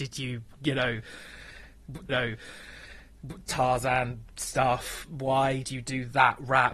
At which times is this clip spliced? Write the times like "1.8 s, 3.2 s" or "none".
2.1 s, 5.6 s